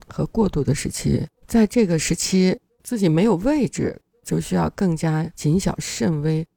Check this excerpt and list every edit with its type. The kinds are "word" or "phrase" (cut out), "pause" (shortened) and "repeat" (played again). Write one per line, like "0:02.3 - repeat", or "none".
0:01.3 - pause